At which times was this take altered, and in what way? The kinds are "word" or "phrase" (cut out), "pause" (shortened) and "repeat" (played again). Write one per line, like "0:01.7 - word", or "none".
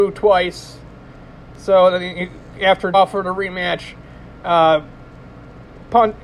0:02.9 - word